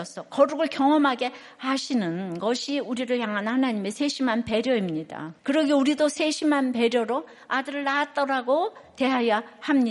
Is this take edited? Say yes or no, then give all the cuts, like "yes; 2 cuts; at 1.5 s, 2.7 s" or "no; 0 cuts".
yes; 1 cut; at 5.4 s